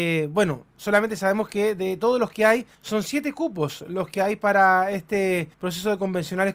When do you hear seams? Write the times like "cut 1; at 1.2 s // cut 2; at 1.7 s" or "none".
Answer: cut 1; at 2.7 s // cut 2; at 5.5 s